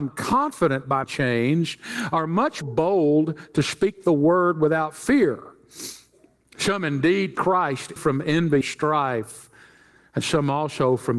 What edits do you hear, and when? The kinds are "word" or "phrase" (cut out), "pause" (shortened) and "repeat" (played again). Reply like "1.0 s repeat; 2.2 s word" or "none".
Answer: 1.0 s word; 2.6 s word; 7.3 s word; 8.0 s word; 8.6 s word